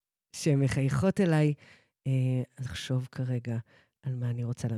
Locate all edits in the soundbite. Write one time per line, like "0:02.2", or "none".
0:02.6

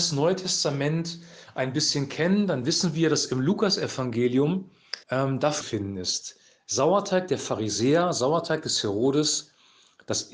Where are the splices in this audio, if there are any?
0:05.0
0:05.6

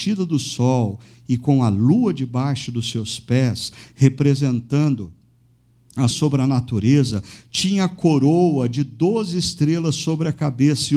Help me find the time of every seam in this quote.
0:06.1

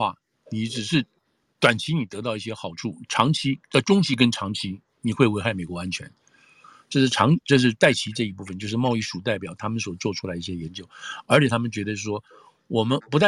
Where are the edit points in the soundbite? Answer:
none

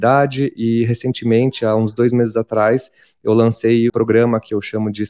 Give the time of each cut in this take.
0:03.9

